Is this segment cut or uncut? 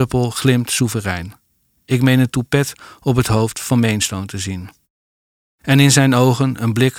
uncut